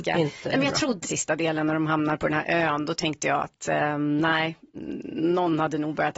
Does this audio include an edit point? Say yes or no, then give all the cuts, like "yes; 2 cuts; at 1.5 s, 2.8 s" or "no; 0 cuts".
yes; 1 cut; at 1.0 s